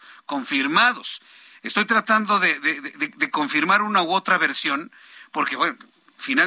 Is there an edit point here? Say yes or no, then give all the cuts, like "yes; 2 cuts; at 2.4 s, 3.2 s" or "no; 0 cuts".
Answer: no; 0 cuts